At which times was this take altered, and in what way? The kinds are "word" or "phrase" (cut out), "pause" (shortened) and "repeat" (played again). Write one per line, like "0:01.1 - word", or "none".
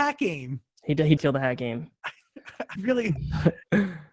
0:01.2 - word
0:02.8 - word